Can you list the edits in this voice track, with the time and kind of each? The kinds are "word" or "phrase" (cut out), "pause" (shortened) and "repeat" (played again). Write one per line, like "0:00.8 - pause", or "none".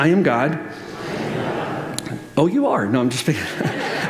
none